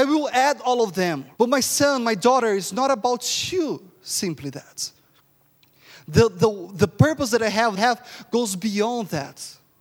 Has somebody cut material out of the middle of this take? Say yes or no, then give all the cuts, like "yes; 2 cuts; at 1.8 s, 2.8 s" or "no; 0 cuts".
yes; 2 cuts; at 1.3 s, 7.8 s